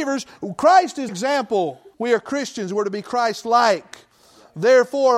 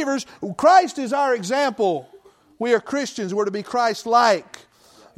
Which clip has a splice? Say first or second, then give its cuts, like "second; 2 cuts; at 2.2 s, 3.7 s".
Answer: first; 2 cuts; at 1.1 s, 1.9 s